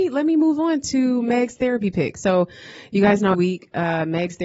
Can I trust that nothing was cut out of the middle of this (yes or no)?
no